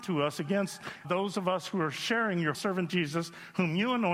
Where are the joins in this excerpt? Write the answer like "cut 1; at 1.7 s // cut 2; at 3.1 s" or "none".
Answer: cut 1; at 1.0 s // cut 2; at 2.5 s